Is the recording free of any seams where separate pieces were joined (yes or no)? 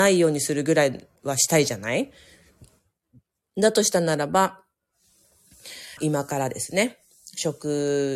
no